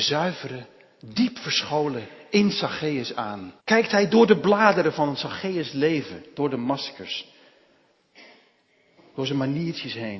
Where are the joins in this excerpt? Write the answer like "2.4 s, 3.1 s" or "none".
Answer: 3.6 s